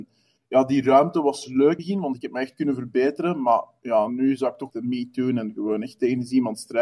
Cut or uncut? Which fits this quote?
cut